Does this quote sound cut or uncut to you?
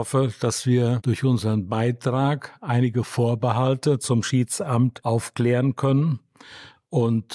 uncut